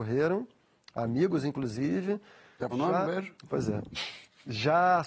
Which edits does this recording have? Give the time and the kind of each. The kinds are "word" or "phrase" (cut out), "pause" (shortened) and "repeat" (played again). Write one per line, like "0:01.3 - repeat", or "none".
0:02.7 - word
0:03.0 - word